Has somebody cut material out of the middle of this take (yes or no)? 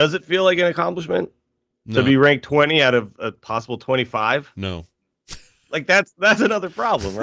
no